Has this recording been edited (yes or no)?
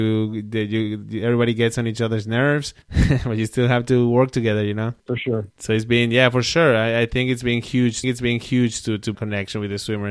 yes